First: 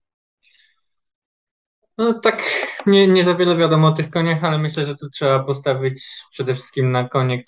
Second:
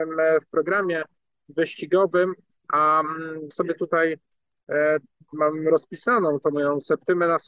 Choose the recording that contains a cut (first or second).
second